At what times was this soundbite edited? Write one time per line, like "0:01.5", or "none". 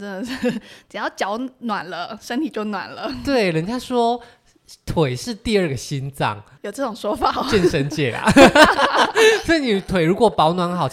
0:06.6